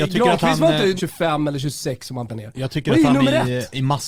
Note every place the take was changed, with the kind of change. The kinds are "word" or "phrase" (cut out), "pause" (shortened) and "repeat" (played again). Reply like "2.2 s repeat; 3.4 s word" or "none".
1.0 s word; 2.3 s word